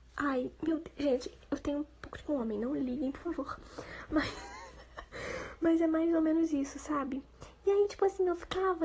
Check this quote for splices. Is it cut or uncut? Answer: cut